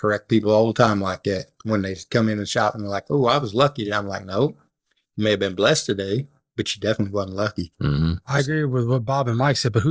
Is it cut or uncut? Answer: uncut